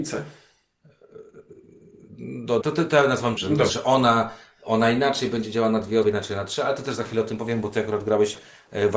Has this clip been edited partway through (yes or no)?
yes